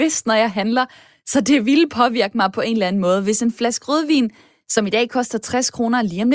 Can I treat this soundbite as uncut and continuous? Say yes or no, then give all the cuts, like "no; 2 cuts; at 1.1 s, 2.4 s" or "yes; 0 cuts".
yes; 0 cuts